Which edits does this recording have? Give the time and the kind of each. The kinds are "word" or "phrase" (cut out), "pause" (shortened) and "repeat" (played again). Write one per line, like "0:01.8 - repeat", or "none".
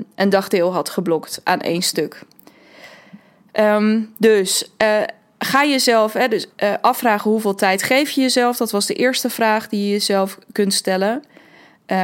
0:06.5 - pause